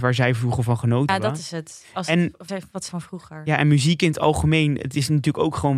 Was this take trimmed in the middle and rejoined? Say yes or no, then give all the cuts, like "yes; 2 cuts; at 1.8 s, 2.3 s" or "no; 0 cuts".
yes; 3 cuts; at 1.1 s, 2.5 s, 2.9 s